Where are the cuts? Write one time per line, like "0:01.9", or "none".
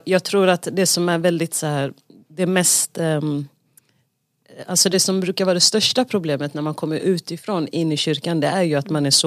none